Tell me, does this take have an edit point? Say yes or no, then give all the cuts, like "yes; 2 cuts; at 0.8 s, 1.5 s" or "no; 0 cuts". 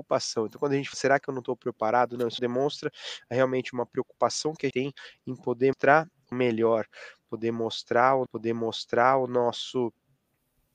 yes; 6 cuts; at 0.9 s, 2.4 s, 4.7 s, 5.7 s, 6.3 s, 8.3 s